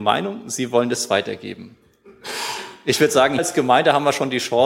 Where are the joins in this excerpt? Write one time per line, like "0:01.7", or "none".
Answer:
0:03.4